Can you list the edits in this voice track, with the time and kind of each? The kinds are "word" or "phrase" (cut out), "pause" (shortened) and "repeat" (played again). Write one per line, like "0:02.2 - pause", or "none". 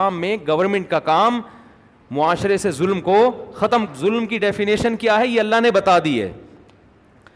0:03.9 - word